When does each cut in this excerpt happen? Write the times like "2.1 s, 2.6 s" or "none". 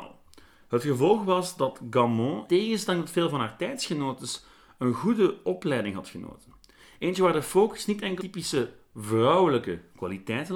2.5 s, 8.2 s

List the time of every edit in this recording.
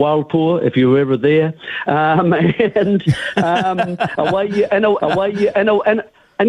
5.0 s

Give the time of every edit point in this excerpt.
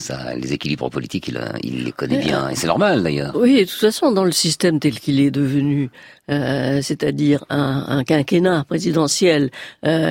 none

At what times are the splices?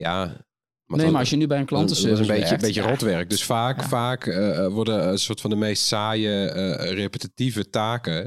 none

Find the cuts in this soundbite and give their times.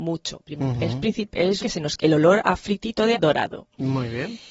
1.6 s, 2.0 s, 3.1 s

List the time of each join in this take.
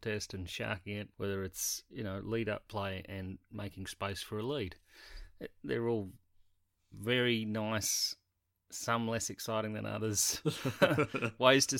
1.1 s

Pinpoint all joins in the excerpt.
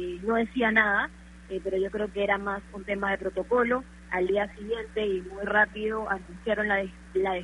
none

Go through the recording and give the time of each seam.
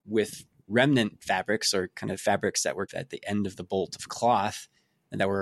none

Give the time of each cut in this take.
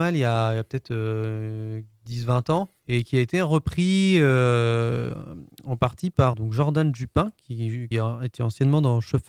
2.8 s, 6.3 s, 7.9 s

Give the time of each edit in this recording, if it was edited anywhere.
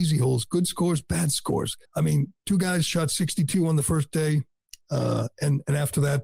1.9 s, 4.8 s

